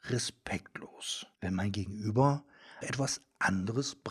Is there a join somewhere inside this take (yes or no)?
yes